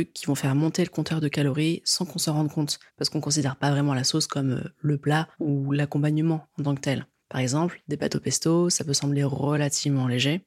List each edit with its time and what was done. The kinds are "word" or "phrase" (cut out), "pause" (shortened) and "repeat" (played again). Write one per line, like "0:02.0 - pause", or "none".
0:02.9 - pause
0:05.3 - pause
0:07.2 - pause